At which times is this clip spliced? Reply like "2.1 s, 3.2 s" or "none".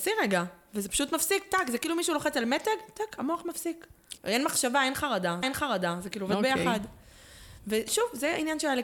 4.2 s, 5.4 s